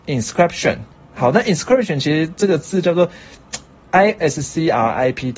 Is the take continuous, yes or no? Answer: no